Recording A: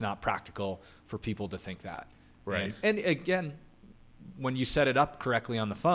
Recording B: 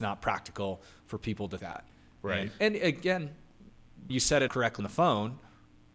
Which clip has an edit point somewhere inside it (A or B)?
B